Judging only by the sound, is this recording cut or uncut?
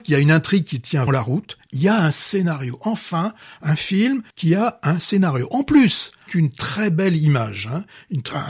cut